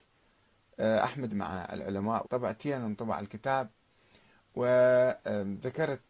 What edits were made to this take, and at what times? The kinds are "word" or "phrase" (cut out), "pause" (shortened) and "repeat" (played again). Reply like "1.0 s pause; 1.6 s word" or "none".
1.3 s word; 2.2 s word